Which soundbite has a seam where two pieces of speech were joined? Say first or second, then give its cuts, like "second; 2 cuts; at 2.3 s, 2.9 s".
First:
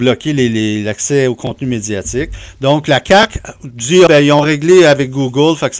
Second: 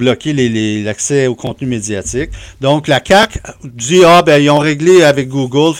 first; 1 cut; at 4.1 s